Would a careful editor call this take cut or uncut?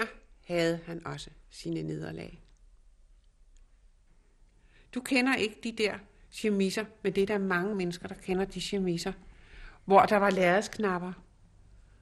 uncut